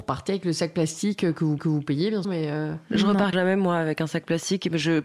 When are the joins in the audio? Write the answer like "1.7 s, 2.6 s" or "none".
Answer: 1.6 s, 2.2 s, 3.3 s